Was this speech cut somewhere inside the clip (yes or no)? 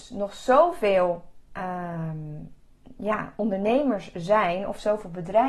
no